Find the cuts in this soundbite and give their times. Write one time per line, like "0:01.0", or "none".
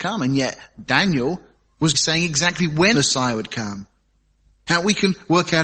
0:01.9
0:02.9